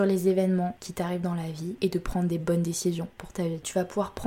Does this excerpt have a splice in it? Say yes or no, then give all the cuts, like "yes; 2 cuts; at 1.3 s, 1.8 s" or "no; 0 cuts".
no; 0 cuts